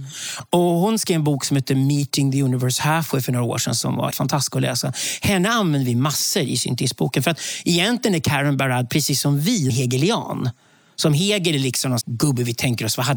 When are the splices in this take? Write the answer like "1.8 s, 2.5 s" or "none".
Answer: 4.1 s, 9.7 s, 12.0 s